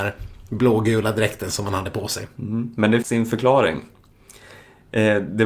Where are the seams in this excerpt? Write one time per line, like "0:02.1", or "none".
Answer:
0:03.0